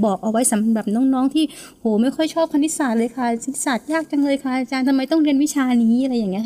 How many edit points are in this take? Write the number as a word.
zero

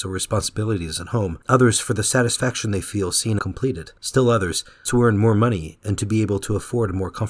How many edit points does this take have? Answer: four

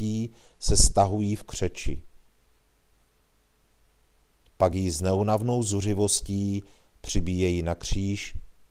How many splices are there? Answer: zero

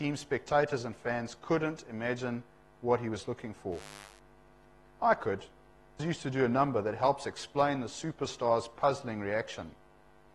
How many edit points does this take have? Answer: one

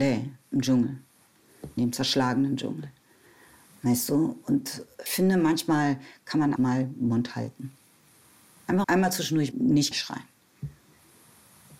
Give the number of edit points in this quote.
six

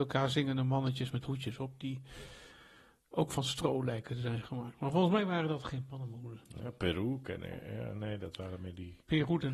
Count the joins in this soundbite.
zero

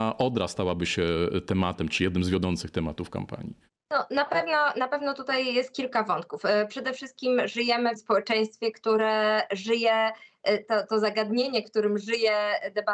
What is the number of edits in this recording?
two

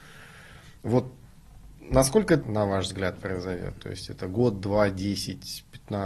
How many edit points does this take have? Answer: one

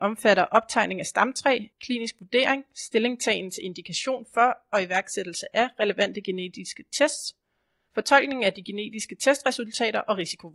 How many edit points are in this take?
one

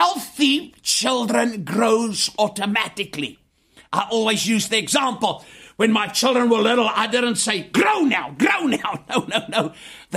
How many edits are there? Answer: zero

